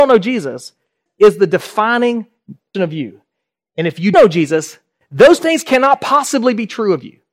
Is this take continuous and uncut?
no; 4 cuts; at 1.1 s, 2.7 s, 4.1 s, 5.4 s

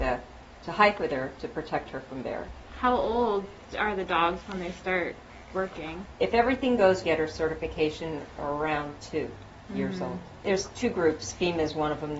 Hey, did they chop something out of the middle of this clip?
yes; 1 cut; at 7.0 s

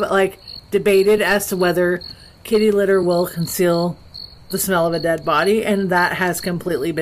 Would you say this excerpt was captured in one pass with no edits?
yes; 0 cuts

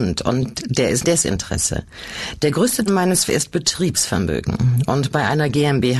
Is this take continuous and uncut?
no; 3 cuts; at 1.0 s, 2.9 s, 3.3 s

